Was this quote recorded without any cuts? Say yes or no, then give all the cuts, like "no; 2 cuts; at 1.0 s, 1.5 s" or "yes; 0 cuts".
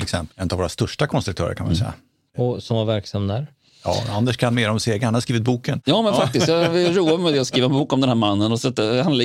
yes; 0 cuts